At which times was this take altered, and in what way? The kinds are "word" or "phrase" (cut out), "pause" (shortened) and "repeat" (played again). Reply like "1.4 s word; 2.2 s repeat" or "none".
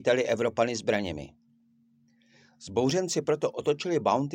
none